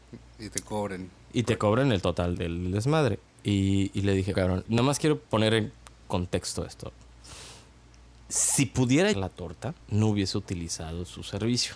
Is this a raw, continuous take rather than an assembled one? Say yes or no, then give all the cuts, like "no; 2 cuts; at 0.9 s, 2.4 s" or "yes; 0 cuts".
no; 6 cuts; at 2.3 s, 4.3 s, 4.7 s, 5.2 s, 9.1 s, 9.8 s